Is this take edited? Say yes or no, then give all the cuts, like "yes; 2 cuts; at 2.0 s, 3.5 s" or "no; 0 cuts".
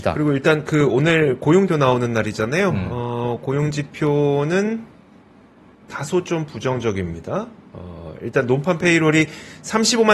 yes; 1 cut; at 1.7 s